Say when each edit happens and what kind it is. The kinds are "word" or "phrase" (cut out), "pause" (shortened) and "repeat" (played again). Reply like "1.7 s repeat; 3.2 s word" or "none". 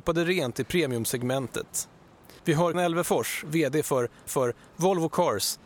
2.4 s pause; 2.7 s word; 4.3 s repeat